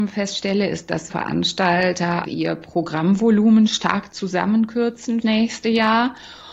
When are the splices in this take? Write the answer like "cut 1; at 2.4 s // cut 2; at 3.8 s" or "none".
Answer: cut 1; at 1.1 s // cut 2; at 2.2 s // cut 3; at 5.2 s